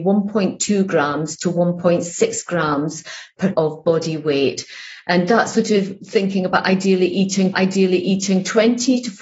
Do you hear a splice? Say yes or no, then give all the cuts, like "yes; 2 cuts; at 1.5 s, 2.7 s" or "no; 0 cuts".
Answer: yes; 2 cuts; at 3.5 s, 7.5 s